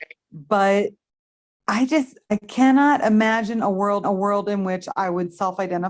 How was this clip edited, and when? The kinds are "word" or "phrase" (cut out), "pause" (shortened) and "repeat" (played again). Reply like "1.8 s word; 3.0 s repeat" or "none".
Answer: 4.0 s repeat